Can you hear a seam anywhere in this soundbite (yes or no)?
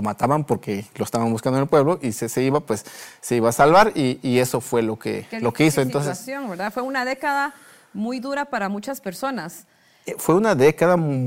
no